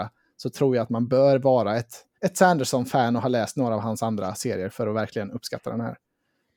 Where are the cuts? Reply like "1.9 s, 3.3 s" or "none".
2.1 s